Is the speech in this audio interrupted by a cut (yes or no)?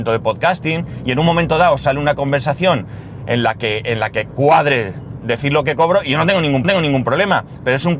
yes